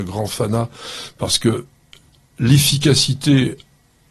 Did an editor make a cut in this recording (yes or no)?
no